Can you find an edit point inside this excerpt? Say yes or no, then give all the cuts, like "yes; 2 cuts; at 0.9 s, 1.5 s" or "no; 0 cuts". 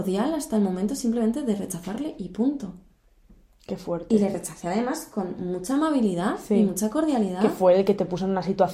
no; 0 cuts